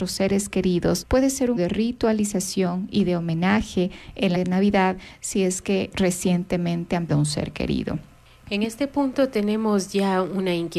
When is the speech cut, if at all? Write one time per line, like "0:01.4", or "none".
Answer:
0:01.6
0:04.3
0:07.1